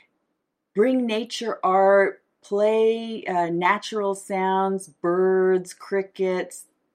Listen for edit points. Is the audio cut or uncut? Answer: uncut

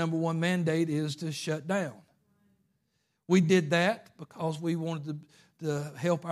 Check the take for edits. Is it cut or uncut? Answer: uncut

